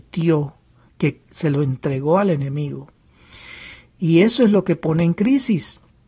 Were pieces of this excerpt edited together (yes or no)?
no